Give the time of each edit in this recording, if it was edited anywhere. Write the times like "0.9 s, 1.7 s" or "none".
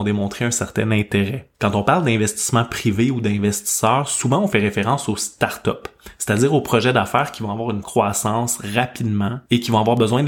1.5 s, 7.8 s